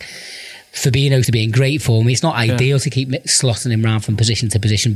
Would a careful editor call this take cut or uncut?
cut